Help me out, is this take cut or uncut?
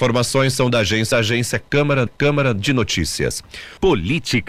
cut